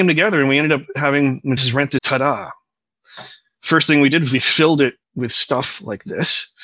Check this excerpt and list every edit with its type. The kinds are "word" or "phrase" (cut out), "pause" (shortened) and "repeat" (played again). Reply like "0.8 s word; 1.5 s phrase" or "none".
1.6 s phrase; 2.0 s word; 5.0 s pause